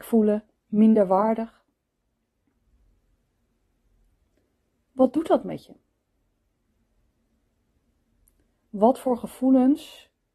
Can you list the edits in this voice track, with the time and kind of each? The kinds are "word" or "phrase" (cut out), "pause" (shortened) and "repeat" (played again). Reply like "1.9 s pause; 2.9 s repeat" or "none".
none